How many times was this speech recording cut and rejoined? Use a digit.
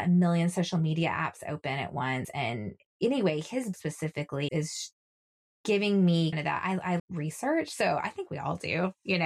4